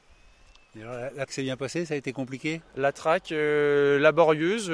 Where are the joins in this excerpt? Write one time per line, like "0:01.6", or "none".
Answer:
0:01.3